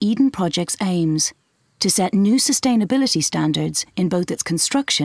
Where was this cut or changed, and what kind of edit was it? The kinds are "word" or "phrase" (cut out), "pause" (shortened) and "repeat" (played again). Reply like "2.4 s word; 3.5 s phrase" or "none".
none